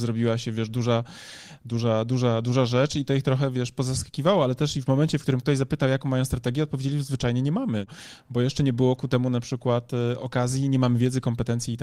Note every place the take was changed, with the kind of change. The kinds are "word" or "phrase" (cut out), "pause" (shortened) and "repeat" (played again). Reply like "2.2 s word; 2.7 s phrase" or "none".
none